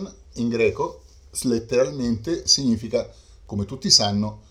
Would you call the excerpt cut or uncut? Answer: uncut